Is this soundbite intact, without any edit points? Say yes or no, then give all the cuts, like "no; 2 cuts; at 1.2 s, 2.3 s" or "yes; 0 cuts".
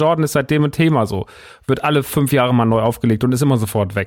yes; 0 cuts